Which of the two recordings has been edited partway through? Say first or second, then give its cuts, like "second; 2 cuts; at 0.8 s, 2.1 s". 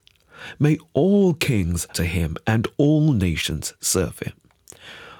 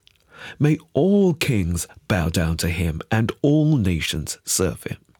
first; 1 cut; at 1.9 s